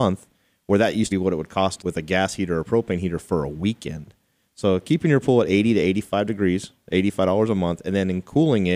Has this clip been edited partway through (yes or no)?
yes